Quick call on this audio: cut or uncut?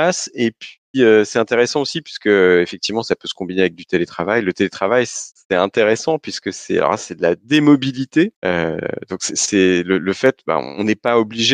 cut